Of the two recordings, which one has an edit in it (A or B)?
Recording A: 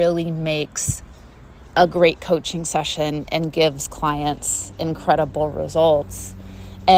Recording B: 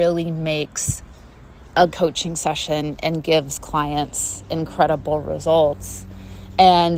B